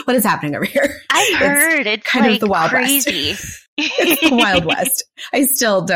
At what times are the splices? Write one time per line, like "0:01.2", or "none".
0:03.7